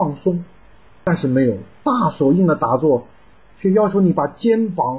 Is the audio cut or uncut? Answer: uncut